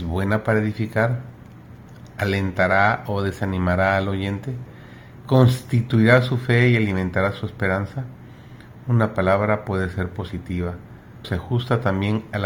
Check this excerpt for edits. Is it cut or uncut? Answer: cut